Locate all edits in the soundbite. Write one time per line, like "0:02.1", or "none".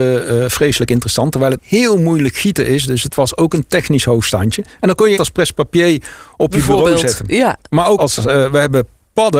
0:01.6
0:05.2
0:08.0